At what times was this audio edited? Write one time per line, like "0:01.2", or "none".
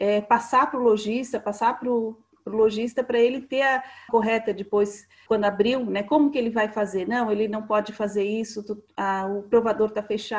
0:04.1
0:05.3